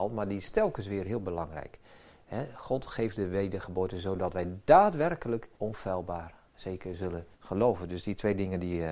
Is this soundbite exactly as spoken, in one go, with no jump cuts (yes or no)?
no